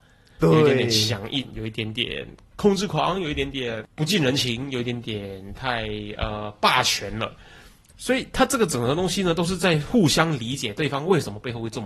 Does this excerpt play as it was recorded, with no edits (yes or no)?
yes